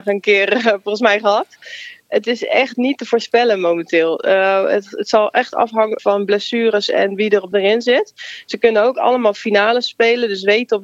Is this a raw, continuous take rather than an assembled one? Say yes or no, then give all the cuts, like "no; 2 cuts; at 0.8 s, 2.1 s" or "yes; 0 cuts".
no; 2 cuts; at 6.0 s, 7.5 s